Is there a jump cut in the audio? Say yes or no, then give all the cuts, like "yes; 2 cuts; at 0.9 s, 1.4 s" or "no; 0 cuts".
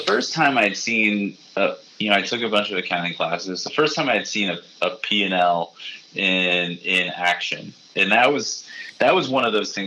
no; 0 cuts